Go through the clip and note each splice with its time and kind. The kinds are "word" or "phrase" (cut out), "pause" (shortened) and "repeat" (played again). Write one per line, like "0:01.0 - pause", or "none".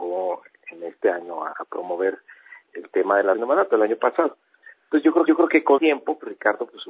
0:01.5 - word
0:02.6 - pause
0:03.3 - word
0:05.3 - repeat
0:05.8 - word